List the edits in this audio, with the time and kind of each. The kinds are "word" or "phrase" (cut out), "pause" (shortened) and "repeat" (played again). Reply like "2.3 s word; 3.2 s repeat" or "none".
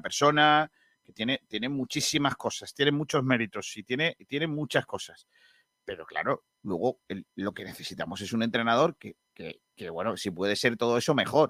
none